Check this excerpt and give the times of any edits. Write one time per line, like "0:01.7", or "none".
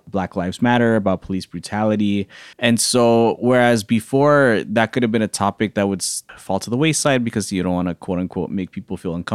0:02.5